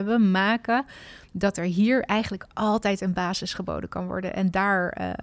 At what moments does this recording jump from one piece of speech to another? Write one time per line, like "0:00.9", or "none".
none